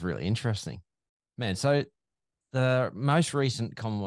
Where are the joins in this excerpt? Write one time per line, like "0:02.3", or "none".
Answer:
none